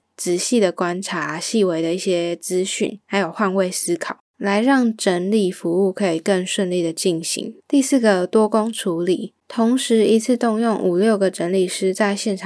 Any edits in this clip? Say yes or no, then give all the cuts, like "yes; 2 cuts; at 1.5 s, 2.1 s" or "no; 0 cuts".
yes; 3 cuts; at 3.0 s, 7.6 s, 9.4 s